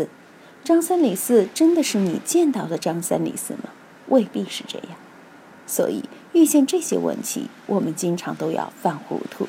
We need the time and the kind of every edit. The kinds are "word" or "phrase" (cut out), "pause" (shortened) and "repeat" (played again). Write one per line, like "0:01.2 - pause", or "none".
none